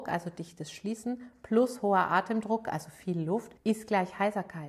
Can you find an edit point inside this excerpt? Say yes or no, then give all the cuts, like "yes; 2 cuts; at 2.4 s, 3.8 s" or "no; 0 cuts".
yes; 1 cut; at 3.6 s